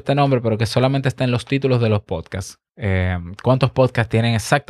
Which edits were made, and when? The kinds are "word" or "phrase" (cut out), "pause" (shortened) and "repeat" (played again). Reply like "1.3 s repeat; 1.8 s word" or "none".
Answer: 2.7 s pause